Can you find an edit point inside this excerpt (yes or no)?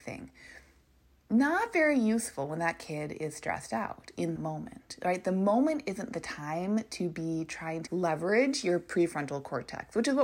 yes